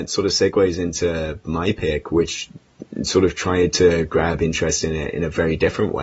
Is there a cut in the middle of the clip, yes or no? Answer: no